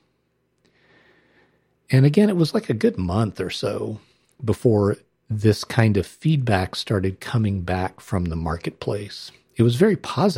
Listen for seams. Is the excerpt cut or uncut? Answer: uncut